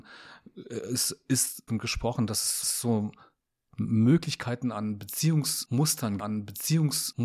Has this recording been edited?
yes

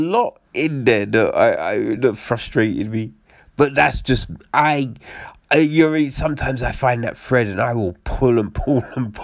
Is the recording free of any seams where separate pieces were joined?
yes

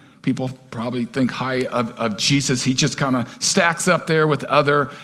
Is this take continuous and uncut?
yes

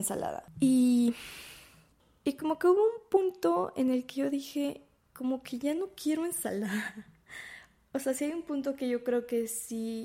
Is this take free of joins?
yes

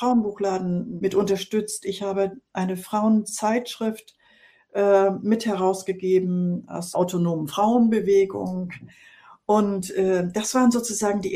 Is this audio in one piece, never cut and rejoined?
no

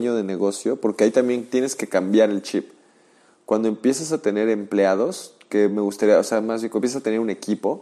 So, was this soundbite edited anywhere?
no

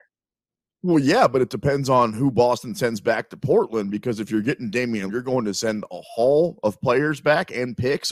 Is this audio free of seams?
no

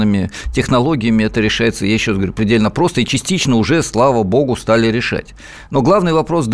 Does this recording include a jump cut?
no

